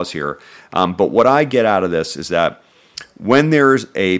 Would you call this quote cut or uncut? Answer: uncut